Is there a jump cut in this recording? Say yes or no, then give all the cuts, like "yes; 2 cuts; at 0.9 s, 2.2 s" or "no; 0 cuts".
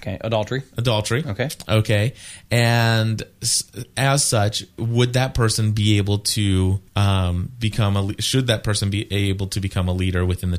yes; 1 cut; at 6.9 s